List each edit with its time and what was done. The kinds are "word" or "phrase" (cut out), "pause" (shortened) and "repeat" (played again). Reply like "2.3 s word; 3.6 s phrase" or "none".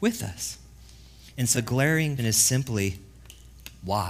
1.5 s word; 2.2 s word